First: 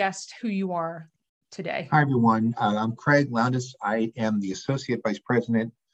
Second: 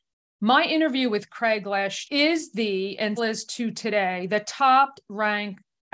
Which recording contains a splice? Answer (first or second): second